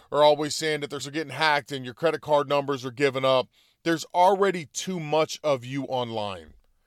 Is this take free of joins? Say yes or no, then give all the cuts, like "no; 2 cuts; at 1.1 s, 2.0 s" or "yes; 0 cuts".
no; 1 cut; at 1.0 s